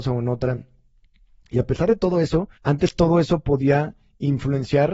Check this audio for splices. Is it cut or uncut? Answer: cut